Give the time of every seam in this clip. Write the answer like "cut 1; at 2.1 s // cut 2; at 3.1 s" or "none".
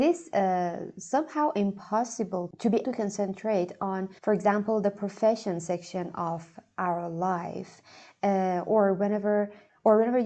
cut 1; at 2.8 s // cut 2; at 4.2 s